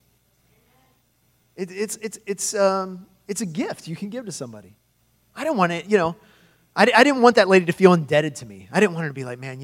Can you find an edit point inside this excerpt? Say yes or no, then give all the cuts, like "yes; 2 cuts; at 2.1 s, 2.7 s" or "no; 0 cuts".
no; 0 cuts